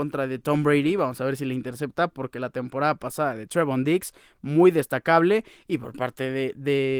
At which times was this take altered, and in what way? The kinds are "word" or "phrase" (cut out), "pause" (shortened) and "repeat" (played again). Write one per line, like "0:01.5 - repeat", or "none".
none